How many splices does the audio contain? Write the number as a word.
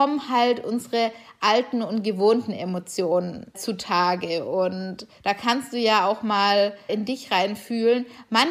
three